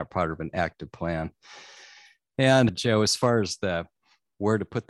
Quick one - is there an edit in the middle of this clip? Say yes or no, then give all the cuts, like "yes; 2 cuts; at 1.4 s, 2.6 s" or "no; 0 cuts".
no; 0 cuts